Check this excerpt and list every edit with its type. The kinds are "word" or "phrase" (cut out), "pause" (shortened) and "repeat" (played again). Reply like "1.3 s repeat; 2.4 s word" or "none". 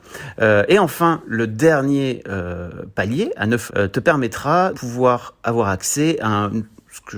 3.7 s word; 4.7 s word